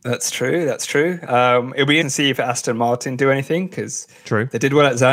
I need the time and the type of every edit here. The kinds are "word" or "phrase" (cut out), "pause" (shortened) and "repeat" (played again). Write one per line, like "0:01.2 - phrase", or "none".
0:02.0 - word